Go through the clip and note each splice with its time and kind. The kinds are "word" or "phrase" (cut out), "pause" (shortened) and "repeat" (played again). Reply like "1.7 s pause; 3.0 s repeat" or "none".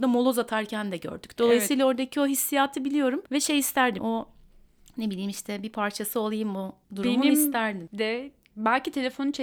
3.3 s pause; 4.0 s word; 6.8 s pause